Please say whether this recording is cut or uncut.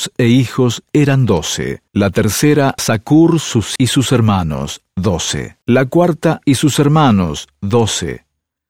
cut